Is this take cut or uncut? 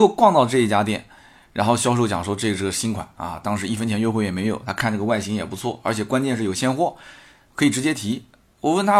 uncut